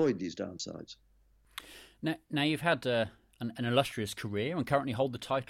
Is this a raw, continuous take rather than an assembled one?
yes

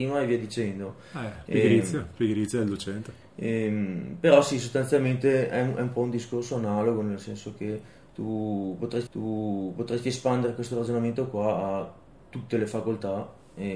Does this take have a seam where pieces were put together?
yes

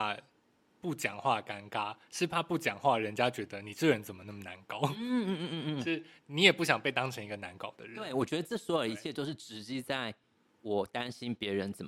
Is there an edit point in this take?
no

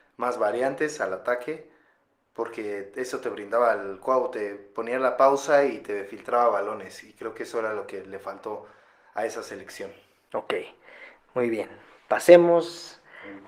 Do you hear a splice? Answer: no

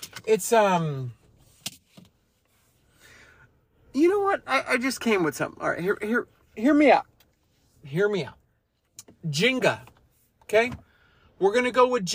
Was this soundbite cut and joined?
no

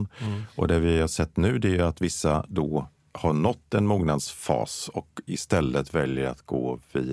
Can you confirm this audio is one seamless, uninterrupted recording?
yes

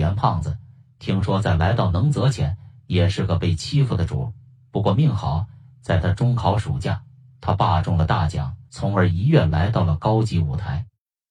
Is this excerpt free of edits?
no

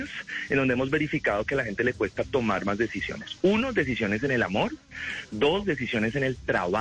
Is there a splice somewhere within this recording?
no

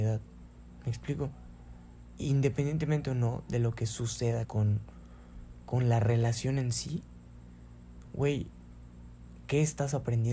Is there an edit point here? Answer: yes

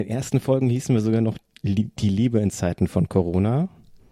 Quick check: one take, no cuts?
yes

